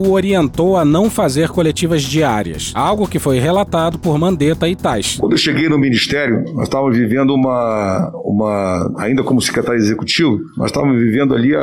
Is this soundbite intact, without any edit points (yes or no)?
yes